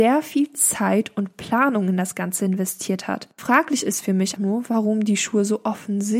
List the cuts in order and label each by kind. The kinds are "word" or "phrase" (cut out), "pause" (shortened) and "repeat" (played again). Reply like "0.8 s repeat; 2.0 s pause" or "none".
4.4 s word